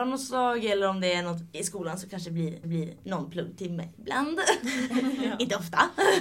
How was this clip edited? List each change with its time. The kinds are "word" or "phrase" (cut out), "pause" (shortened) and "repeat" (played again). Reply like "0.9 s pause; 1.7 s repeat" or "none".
1.5 s word; 2.6 s repeat